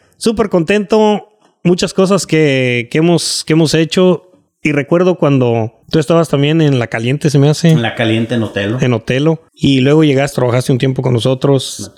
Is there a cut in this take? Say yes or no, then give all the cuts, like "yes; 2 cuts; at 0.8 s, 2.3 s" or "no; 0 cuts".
yes; 4 cuts; at 4.5 s, 5.8 s, 9.5 s, 10.3 s